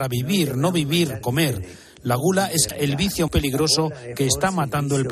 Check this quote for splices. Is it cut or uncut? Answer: cut